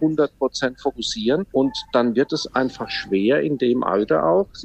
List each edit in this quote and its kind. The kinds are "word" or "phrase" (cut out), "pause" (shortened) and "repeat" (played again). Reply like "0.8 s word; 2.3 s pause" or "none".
1.5 s pause